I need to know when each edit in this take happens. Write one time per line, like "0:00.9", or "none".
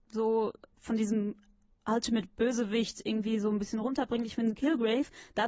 none